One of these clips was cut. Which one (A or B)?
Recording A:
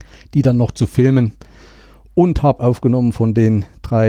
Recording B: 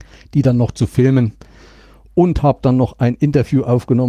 A